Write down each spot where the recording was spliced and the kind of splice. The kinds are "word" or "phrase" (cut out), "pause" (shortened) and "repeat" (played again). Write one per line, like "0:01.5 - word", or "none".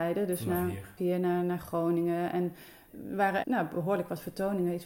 0:01.0 - word
0:03.4 - word